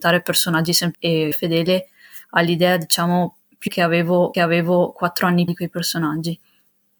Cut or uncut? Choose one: cut